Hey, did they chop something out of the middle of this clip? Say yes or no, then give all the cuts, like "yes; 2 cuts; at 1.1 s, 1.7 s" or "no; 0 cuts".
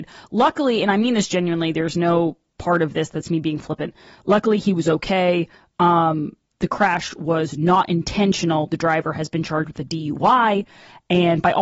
no; 0 cuts